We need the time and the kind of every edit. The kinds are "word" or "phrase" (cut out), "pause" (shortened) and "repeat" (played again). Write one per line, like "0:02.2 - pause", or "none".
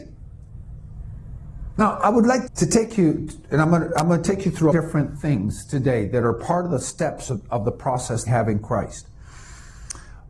0:02.5 - word
0:04.7 - phrase
0:08.3 - phrase